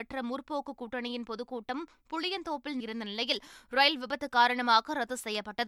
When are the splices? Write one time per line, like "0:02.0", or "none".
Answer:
0:02.8

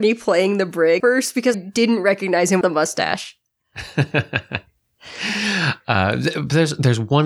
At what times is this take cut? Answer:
0:01.0
0:01.5
0:02.6

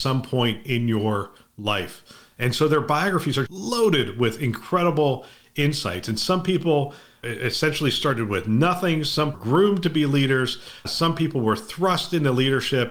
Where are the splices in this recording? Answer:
0:03.5
0:09.3

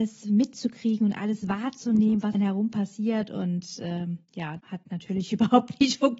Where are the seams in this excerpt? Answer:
0:02.3
0:04.6

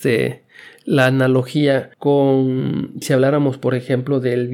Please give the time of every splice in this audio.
0:03.0

